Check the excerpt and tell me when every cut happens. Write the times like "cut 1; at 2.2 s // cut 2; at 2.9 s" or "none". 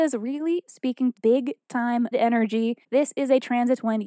cut 1; at 1.1 s // cut 2; at 2.1 s // cut 3; at 2.8 s